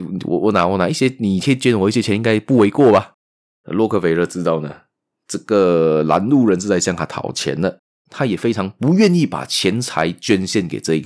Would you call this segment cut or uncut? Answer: uncut